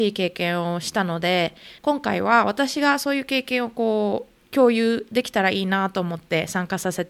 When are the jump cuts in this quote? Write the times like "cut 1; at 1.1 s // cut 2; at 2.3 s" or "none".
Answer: cut 1; at 1.8 s // cut 2; at 4.4 s